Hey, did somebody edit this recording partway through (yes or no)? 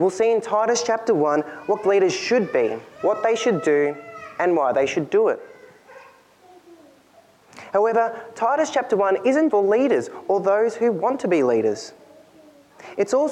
yes